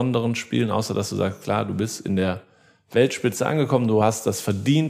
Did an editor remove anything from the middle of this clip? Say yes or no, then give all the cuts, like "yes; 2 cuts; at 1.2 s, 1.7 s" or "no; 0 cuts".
no; 0 cuts